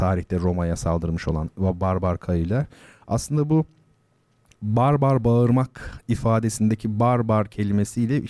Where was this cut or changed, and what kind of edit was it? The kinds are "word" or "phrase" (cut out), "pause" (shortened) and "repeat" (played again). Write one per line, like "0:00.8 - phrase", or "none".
none